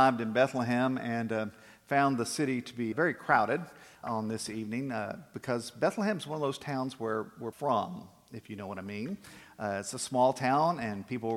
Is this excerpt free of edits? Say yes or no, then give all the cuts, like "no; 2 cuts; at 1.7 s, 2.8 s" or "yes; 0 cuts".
no; 3 cuts; at 2.9 s, 4.0 s, 7.5 s